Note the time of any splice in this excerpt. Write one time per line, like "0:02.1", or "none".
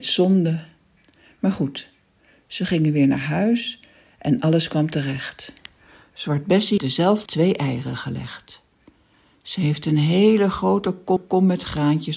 0:06.8
0:07.3
0:11.2